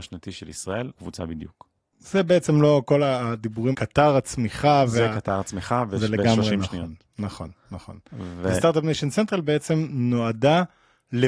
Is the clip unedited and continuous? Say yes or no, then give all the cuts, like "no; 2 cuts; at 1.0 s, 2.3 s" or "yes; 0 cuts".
no; 2 cuts; at 1.0 s, 3.7 s